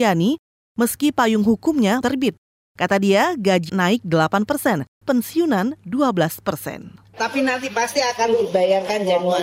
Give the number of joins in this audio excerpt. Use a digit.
3